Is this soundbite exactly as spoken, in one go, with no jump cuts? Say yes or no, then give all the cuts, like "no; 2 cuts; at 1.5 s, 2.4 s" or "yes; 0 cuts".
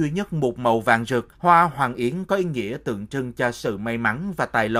no; 1 cut; at 1.3 s